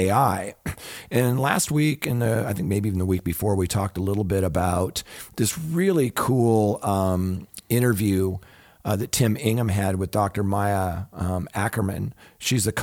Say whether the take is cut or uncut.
uncut